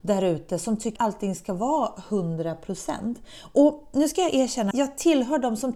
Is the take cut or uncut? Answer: cut